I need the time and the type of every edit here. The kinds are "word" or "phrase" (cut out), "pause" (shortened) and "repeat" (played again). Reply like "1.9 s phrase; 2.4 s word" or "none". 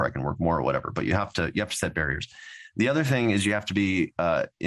none